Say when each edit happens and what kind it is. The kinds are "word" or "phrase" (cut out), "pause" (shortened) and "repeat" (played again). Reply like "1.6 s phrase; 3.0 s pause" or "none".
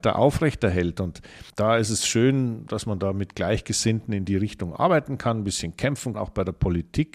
1.5 s pause; 6.1 s word